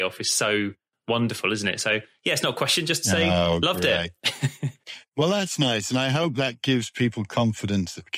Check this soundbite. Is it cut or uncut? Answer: uncut